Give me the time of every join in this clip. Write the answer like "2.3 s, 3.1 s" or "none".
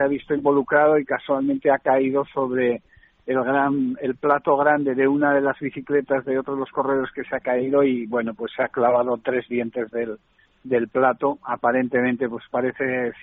none